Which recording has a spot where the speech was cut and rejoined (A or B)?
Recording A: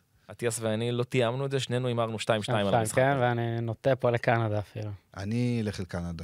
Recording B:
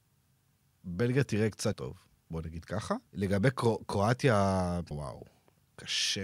B